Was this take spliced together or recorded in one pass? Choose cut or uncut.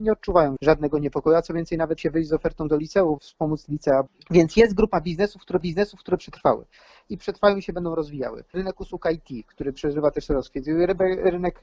cut